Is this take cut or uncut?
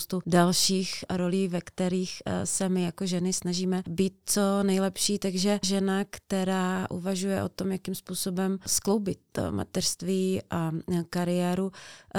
cut